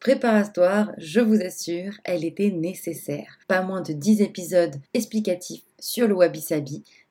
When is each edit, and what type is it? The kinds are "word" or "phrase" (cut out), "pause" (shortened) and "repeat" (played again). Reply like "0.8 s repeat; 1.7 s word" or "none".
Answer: 3.4 s pause; 4.9 s pause